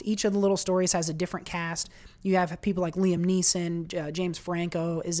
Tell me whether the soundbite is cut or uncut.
uncut